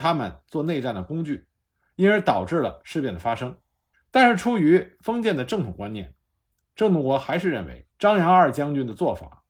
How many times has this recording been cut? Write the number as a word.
two